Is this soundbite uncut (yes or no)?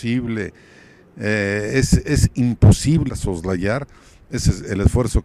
no